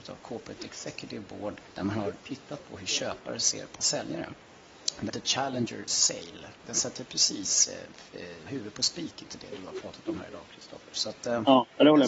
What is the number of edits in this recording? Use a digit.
5